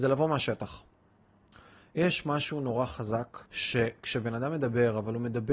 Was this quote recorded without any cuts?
no; 1 cut; at 3.5 s

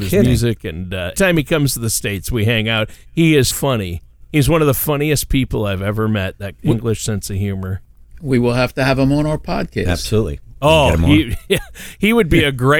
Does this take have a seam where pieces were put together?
yes; 3 cuts; at 1.1 s, 3.5 s, 6.6 s

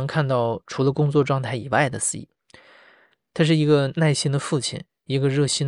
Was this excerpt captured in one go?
yes; 0 cuts

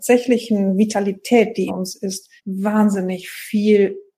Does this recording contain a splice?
yes; 2 cuts; at 1.7 s, 2.4 s

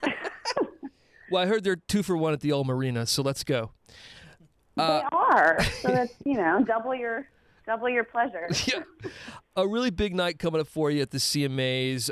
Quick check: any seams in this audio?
no; 0 cuts

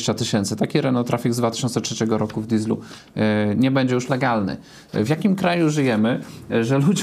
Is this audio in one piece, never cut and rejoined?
yes; 0 cuts

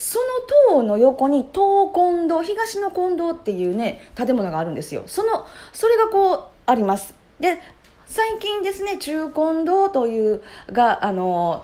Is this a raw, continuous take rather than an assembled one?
yes; 0 cuts

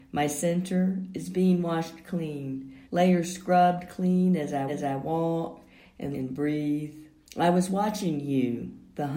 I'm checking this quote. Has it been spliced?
yes; 4 cuts; at 2.8 s, 4.7 s, 6.1 s, 7.2 s

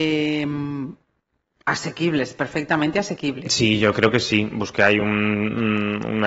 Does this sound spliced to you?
no; 0 cuts

